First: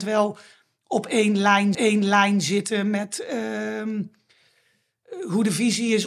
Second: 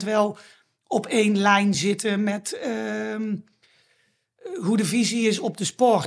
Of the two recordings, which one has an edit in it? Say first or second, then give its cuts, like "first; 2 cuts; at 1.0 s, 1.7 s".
first; 1 cut; at 1.7 s